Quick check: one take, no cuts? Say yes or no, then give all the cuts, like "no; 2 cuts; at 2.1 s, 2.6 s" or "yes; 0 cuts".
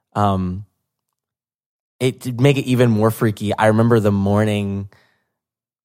yes; 0 cuts